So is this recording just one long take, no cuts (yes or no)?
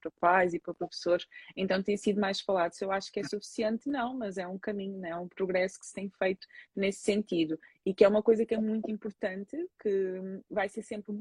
yes